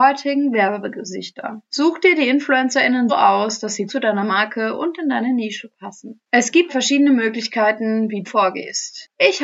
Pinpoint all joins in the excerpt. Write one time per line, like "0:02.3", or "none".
0:01.7
0:03.1
0:03.9
0:06.7
0:08.2